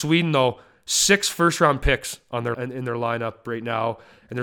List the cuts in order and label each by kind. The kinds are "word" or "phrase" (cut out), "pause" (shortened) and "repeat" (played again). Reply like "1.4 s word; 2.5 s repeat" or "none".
2.5 s word